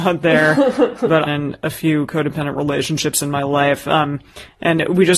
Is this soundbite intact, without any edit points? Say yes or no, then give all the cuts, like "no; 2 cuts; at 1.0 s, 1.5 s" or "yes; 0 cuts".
no; 1 cut; at 1.3 s